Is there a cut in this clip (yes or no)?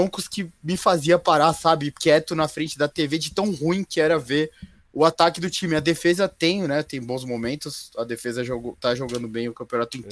no